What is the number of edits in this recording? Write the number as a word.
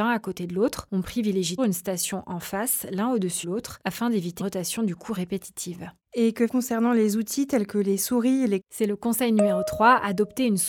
five